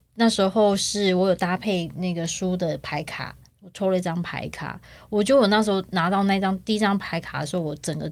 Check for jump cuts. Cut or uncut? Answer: uncut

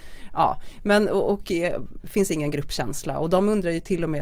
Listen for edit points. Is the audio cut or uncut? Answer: uncut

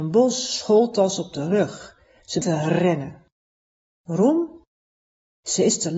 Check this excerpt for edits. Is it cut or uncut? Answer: cut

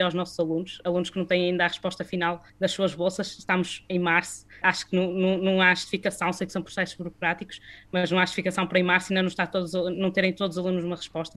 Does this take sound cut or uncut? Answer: cut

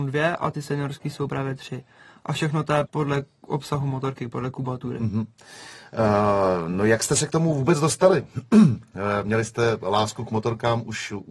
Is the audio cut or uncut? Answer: cut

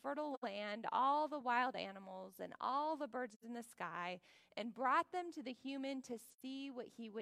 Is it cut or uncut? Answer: uncut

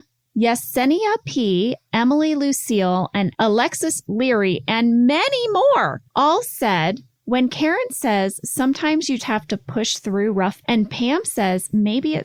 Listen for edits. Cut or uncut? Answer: cut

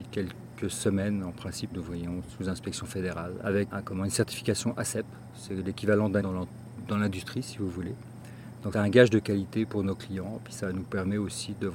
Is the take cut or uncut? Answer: cut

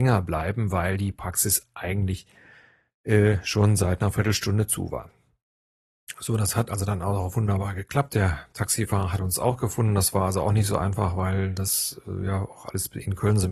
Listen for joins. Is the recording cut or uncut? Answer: uncut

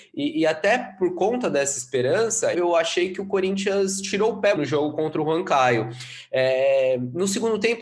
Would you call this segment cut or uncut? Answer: cut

